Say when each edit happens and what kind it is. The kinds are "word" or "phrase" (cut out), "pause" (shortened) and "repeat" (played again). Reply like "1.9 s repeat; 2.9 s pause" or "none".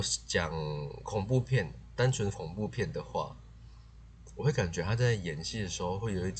2.3 s word